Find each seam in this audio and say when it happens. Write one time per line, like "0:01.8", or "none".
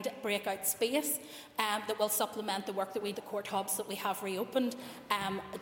0:03.1